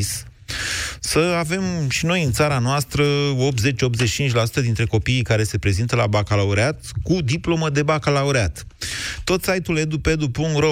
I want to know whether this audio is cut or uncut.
uncut